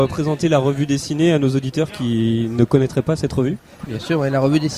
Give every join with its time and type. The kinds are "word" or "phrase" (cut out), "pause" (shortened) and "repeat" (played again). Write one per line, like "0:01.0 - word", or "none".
0:03.9 - word